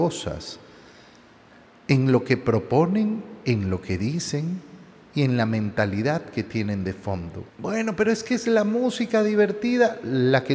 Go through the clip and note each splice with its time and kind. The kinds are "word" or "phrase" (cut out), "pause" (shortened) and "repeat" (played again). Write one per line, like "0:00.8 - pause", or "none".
0:07.5 - pause